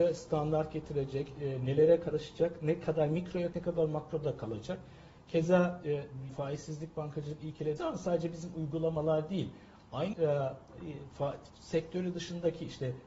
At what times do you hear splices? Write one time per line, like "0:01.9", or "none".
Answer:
0:03.5
0:06.3
0:07.8
0:10.1
0:11.5